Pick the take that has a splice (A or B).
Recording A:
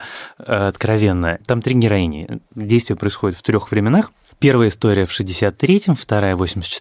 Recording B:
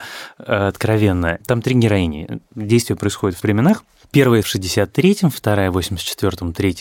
B